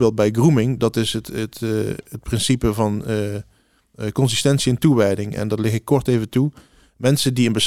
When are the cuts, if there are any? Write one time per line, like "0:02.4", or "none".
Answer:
none